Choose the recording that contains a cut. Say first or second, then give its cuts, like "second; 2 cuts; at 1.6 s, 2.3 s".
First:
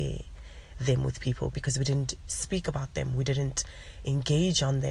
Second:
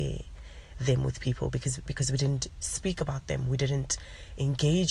first; 1 cut; at 1.5 s